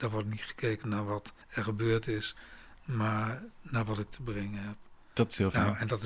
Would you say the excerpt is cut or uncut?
cut